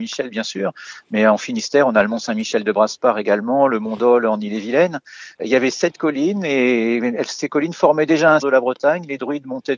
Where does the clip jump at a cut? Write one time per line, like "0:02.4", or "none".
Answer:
0:05.4
0:08.4